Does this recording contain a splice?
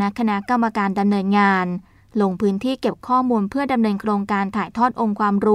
no; 0 cuts

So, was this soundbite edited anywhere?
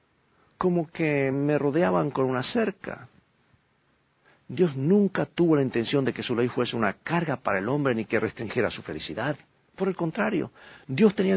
no; 0 cuts

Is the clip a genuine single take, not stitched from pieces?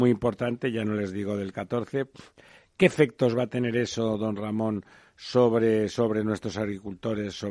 yes; 0 cuts

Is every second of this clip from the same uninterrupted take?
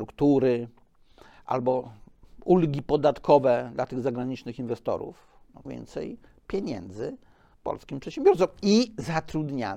no; 2 cuts; at 5.7 s, 7.5 s

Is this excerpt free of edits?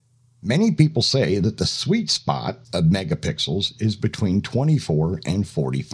no; 1 cut; at 2.7 s

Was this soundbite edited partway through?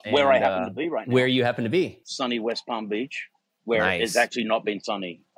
no; 0 cuts

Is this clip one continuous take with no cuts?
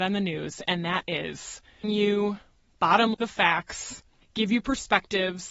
no; 2 cuts; at 1.8 s, 3.1 s

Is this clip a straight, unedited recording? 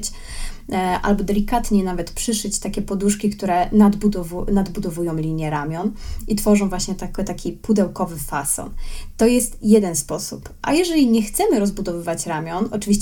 yes; 0 cuts

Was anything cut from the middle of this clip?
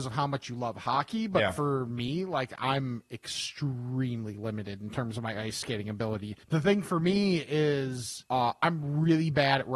yes; 2 cuts; at 6.4 s, 8.3 s

